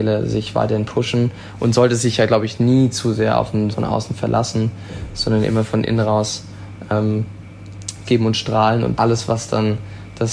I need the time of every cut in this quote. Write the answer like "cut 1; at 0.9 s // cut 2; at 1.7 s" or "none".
cut 1; at 3.7 s // cut 2; at 8.0 s // cut 3; at 9.0 s

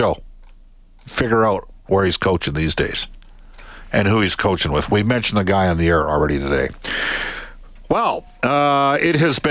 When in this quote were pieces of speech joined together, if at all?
none

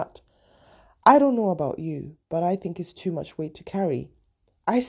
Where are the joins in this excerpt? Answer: none

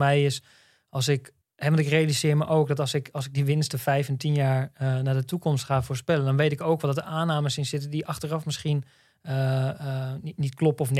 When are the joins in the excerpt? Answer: cut 1; at 1.4 s

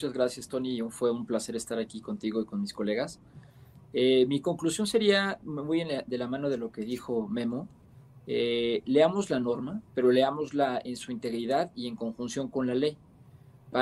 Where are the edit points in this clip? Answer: cut 1; at 9.9 s

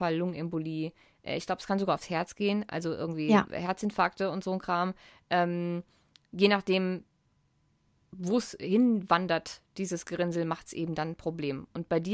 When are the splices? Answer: none

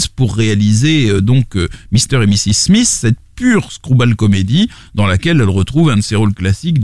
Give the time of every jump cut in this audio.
none

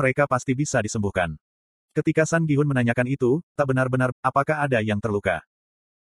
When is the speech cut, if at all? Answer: cut 1; at 3.6 s // cut 2; at 4.1 s

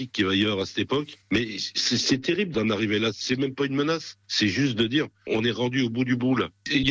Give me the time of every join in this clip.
cut 1; at 4.2 s

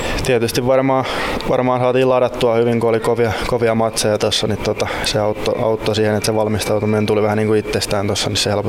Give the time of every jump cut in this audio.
none

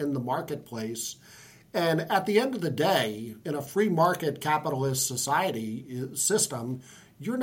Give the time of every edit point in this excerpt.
none

